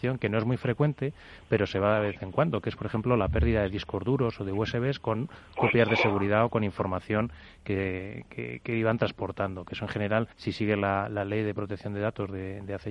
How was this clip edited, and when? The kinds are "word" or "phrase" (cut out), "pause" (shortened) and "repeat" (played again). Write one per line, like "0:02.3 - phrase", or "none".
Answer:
0:10.3 - pause